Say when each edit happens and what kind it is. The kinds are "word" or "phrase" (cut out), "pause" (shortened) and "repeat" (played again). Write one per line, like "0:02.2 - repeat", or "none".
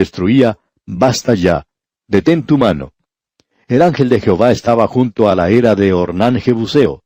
none